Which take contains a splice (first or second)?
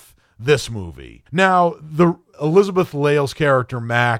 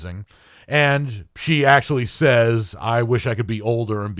first